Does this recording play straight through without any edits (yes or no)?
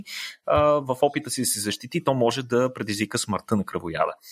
yes